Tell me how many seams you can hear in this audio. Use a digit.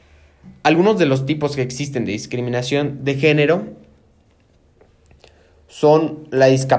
0